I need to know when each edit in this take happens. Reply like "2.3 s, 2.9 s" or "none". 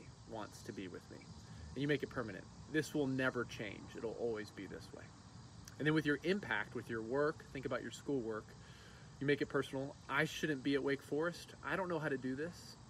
none